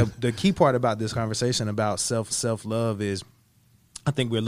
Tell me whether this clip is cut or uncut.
cut